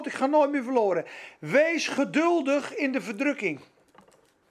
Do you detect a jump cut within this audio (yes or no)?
no